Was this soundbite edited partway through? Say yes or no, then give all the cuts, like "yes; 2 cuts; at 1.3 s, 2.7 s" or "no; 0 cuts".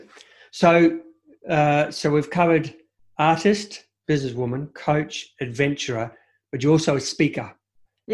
no; 0 cuts